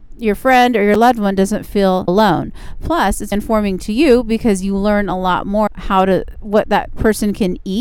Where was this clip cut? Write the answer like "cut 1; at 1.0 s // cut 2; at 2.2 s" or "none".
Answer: cut 1; at 2.1 s // cut 2; at 3.3 s // cut 3; at 5.7 s